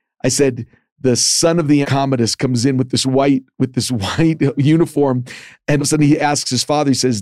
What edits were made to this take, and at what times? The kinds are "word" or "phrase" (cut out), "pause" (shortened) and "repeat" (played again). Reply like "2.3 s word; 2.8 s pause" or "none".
1.8 s word; 5.8 s word